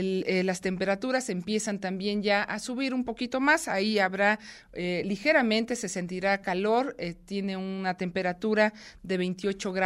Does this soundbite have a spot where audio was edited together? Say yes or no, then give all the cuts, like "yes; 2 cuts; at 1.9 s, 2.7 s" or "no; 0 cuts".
no; 0 cuts